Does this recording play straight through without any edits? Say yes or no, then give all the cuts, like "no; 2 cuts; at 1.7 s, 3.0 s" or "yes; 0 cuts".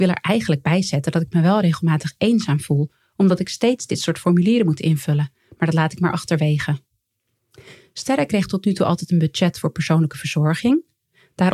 yes; 0 cuts